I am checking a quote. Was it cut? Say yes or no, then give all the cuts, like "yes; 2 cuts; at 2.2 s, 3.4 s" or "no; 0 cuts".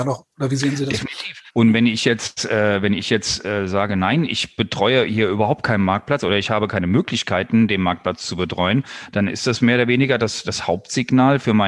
yes; 1 cut; at 1.5 s